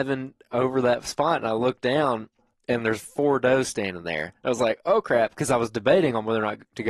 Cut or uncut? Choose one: uncut